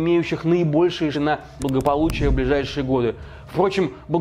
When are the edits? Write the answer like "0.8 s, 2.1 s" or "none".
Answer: 1.1 s, 1.6 s

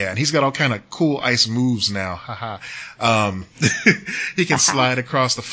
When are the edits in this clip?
none

